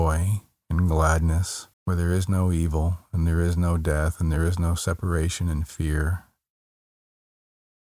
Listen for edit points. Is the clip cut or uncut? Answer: cut